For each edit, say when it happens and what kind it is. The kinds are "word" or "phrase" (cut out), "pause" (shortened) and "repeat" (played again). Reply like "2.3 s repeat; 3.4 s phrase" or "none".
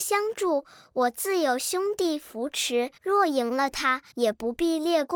3.0 s pause; 4.1 s pause